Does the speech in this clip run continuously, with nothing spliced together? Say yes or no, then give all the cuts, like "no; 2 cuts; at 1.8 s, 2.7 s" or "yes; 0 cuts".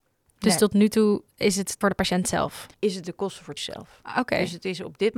no; 4 cuts; at 1.3 s, 1.8 s, 2.7 s, 3.6 s